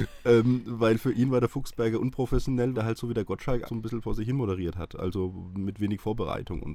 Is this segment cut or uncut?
cut